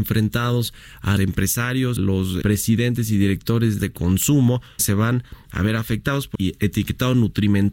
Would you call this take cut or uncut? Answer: cut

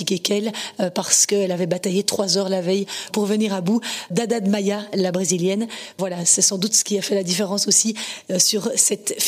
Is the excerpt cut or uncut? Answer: uncut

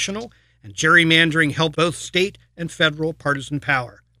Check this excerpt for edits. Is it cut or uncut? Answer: cut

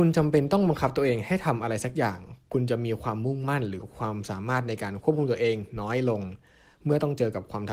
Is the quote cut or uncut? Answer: uncut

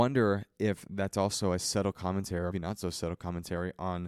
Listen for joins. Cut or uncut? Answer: cut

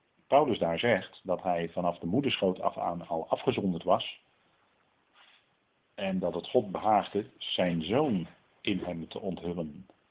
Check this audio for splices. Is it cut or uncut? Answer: uncut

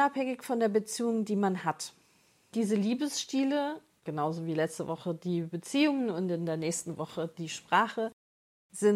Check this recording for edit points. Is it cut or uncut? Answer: uncut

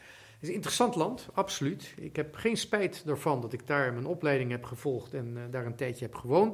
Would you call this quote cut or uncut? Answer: uncut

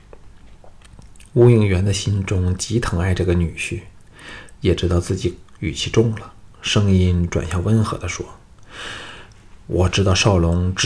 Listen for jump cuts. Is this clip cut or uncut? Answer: cut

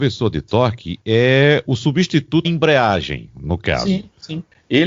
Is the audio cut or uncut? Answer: cut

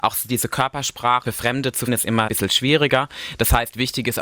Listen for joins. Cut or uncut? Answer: cut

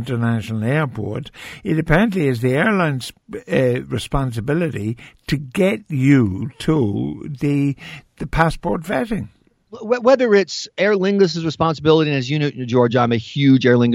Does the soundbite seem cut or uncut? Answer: uncut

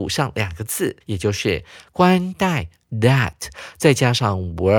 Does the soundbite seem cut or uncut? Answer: cut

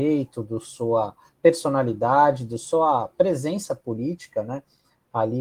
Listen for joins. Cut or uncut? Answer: uncut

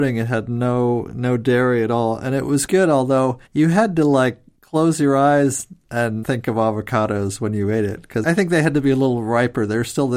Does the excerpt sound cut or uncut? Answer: cut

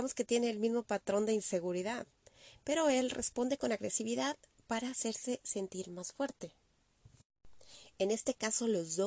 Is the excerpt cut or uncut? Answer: uncut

